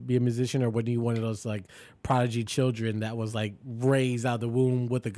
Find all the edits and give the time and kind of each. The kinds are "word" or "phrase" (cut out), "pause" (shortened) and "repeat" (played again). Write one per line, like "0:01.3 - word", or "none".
none